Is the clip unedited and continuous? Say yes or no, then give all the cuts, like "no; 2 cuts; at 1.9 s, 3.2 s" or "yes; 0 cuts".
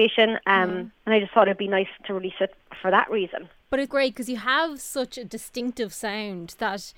no; 3 cuts; at 0.9 s, 2.0 s, 3.9 s